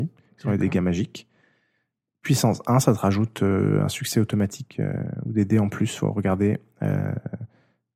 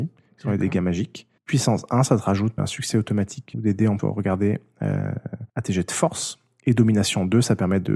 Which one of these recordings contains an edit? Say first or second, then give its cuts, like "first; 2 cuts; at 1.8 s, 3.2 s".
second; 5 cuts; at 1.4 s, 2.6 s, 3.5 s, 4.0 s, 5.5 s